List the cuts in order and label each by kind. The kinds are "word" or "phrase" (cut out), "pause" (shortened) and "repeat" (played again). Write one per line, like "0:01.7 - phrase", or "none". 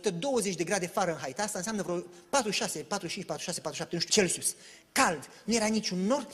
0:04.1 - word